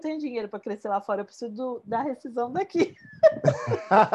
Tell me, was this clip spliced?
no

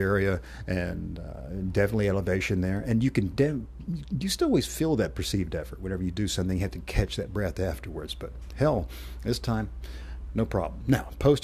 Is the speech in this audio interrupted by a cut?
no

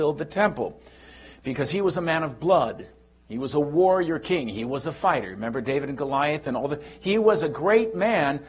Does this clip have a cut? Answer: no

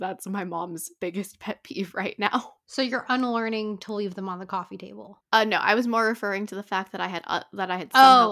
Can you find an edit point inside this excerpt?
no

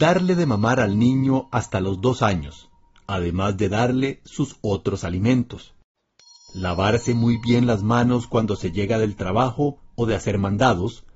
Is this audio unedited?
yes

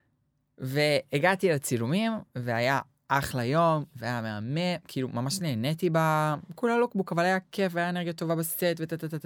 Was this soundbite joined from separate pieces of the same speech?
no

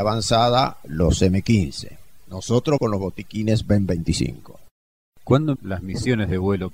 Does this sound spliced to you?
yes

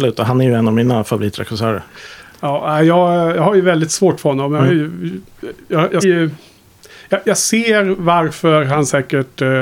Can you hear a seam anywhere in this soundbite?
yes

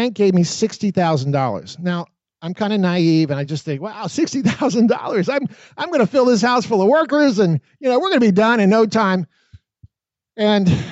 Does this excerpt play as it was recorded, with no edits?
yes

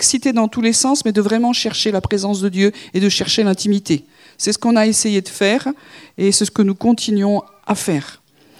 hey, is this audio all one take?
yes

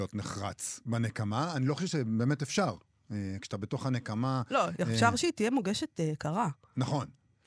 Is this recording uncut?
yes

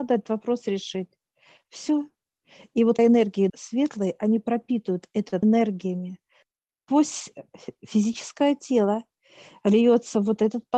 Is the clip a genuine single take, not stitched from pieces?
no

